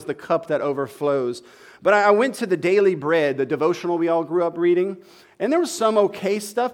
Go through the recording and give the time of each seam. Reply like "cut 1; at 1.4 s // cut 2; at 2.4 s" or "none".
none